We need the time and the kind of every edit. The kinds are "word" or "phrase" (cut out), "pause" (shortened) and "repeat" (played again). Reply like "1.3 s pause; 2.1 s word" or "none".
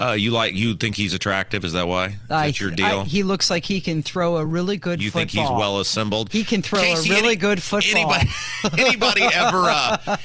none